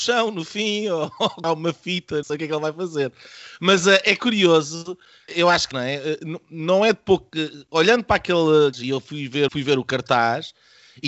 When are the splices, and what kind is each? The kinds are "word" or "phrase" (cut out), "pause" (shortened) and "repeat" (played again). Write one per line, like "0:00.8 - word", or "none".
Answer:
0:01.4 - word
0:02.2 - word
0:05.3 - word
0:05.7 - word
0:08.7 - word
0:09.5 - word